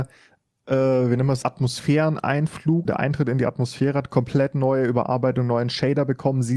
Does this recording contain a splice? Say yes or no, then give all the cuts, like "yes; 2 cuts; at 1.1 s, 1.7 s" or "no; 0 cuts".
yes; 2 cuts; at 1.4 s, 2.9 s